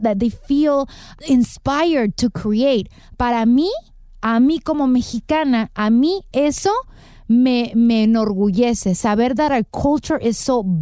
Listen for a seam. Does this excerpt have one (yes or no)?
no